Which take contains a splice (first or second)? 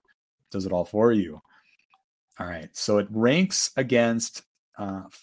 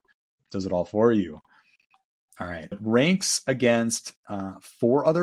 second